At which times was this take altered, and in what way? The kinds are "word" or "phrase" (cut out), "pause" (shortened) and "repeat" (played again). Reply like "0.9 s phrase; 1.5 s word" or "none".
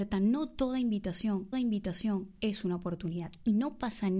1.5 s repeat